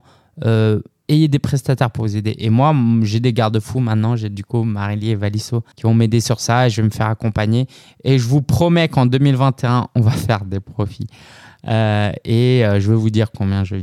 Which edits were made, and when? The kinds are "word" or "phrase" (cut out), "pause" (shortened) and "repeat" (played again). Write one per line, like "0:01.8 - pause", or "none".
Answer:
0:05.7 - pause